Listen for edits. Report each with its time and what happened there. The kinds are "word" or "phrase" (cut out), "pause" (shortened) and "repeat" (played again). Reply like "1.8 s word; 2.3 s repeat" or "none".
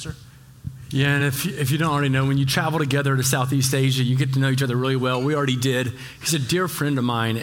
none